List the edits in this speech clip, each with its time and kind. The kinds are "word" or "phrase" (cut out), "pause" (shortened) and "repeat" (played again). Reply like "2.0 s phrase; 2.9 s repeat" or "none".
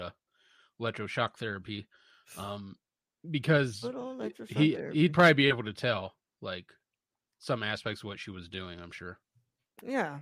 none